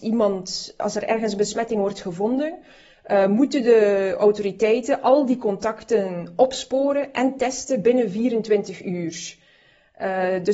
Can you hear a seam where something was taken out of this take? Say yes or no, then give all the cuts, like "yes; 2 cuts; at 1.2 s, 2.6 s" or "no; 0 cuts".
no; 0 cuts